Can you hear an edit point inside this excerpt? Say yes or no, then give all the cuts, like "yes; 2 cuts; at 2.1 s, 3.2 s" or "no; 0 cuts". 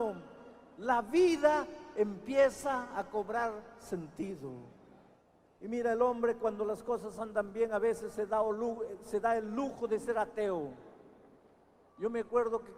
no; 0 cuts